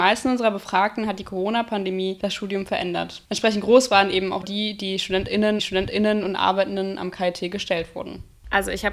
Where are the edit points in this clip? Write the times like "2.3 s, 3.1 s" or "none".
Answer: 4.4 s, 5.6 s